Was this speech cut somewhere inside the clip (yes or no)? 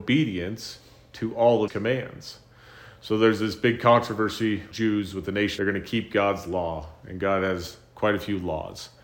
yes